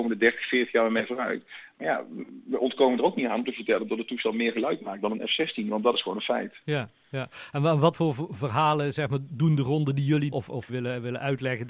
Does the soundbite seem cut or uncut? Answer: cut